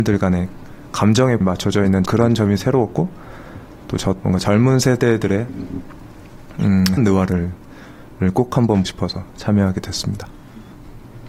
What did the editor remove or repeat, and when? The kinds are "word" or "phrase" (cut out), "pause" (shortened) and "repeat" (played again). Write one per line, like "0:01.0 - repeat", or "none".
0:01.4 - word
0:02.1 - word
0:04.2 - word
0:07.0 - word
0:08.9 - word